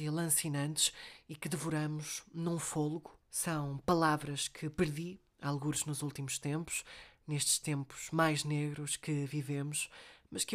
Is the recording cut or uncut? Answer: cut